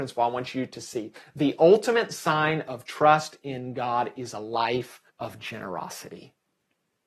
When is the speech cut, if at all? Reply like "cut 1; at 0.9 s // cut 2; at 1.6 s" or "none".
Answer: cut 1; at 5.1 s